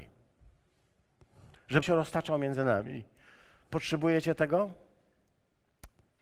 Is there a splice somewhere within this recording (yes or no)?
yes